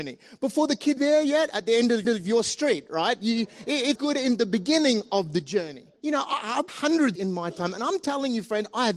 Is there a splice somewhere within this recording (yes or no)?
yes